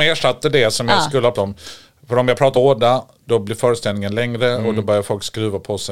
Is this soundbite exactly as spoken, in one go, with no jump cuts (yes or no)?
no